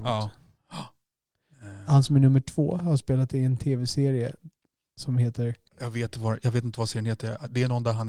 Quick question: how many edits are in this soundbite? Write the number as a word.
one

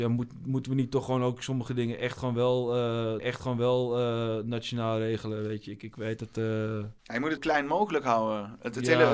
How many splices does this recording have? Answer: four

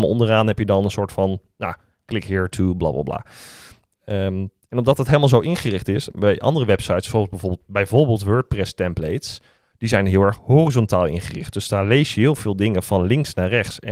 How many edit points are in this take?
zero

